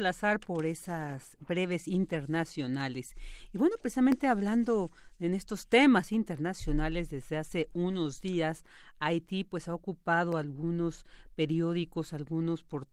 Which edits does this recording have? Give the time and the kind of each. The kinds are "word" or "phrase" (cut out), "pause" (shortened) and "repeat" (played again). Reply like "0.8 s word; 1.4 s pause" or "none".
none

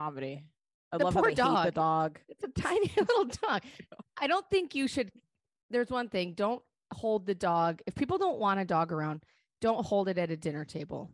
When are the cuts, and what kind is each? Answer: none

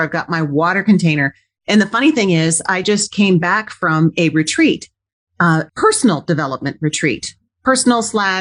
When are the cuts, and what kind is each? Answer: none

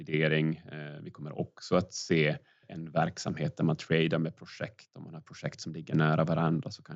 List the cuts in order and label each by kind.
none

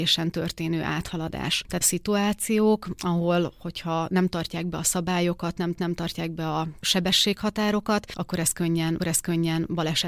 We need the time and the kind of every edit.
1.8 s phrase; 5.7 s repeat; 9.0 s repeat

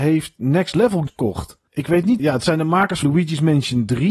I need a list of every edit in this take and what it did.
1.1 s word; 1.7 s pause; 2.2 s word; 3.0 s word

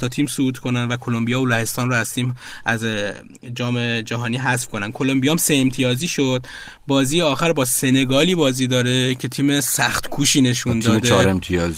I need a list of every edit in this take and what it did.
none

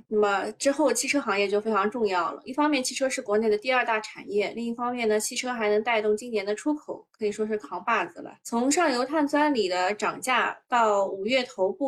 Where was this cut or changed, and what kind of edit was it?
8.4 s pause

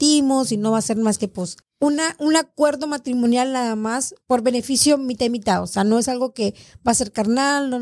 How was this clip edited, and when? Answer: 1.6 s pause; 4.2 s pause

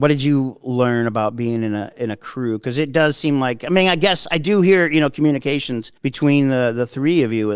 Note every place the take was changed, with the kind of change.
6.0 s pause

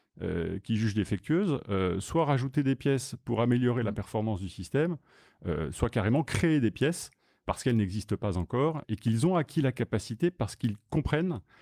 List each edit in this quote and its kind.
7.4 s word; 8.8 s word

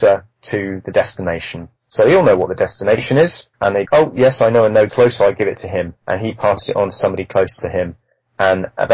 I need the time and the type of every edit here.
1.8 s pause; 3.5 s pause; 3.9 s word; 4.9 s word; 5.2 s phrase; 6.0 s pause

